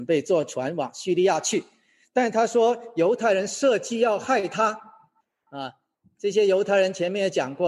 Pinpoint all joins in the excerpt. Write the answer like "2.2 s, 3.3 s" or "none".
none

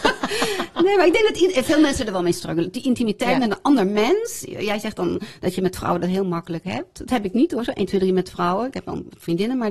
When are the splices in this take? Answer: none

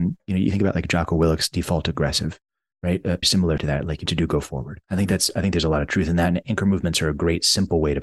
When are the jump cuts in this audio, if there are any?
3.2 s, 3.6 s, 4.1 s, 4.8 s

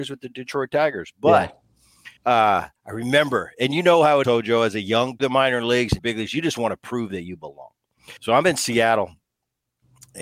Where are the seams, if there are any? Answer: 2.2 s, 2.8 s, 4.2 s, 5.2 s, 6.0 s, 8.2 s

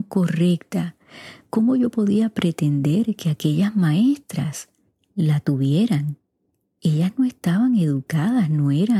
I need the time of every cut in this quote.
none

